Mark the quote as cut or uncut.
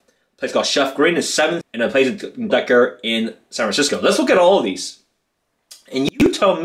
cut